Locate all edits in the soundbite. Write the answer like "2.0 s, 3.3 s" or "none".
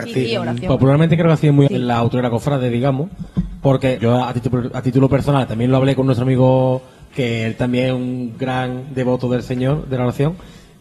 1.7 s, 4.0 s, 7.1 s